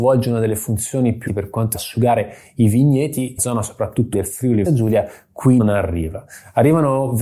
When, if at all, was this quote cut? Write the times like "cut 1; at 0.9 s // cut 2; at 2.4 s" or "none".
cut 1; at 1.3 s // cut 2; at 1.7 s // cut 3; at 3.4 s // cut 4; at 4.1 s // cut 5; at 4.6 s // cut 6; at 5.6 s